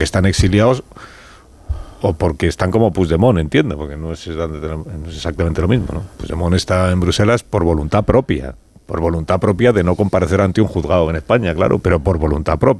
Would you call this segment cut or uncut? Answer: uncut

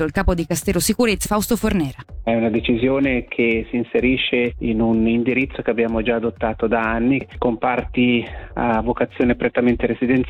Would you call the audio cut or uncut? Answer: cut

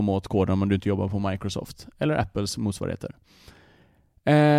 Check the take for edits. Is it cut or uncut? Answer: uncut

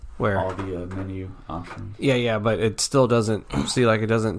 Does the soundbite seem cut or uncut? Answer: uncut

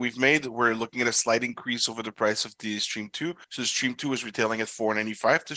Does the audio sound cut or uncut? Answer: cut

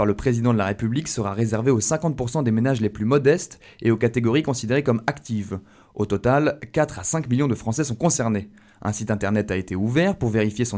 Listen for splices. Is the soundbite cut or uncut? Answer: uncut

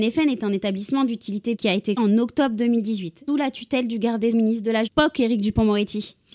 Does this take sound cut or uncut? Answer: cut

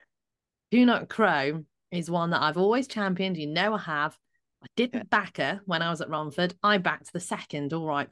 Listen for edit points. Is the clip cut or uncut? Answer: uncut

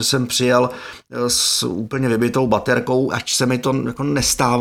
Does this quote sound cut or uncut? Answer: uncut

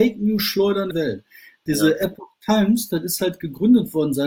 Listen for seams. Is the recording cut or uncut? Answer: cut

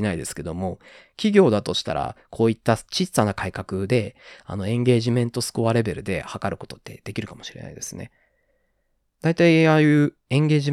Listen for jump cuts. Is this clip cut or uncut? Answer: uncut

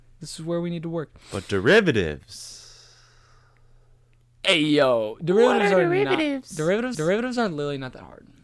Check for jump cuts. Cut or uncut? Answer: cut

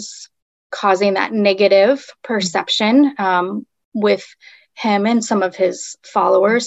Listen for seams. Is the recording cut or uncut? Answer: uncut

